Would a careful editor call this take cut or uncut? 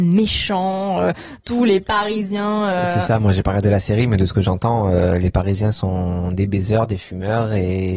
uncut